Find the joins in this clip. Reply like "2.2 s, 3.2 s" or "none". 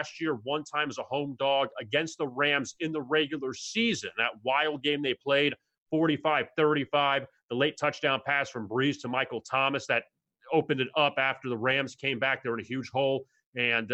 none